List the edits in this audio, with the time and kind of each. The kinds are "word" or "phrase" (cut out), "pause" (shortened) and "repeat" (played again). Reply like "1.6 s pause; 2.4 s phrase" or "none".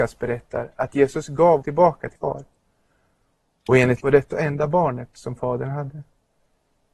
1.6 s word; 2.2 s word; 4.0 s word; 4.3 s word